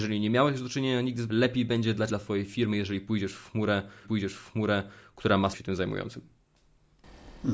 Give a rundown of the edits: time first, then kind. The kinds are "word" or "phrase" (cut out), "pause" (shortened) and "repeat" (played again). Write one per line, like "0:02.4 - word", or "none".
0:01.3 - word
0:02.1 - word
0:04.0 - repeat
0:05.5 - word